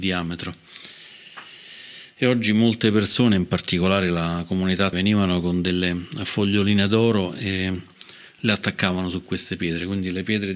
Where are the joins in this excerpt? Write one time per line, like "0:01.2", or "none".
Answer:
0:04.9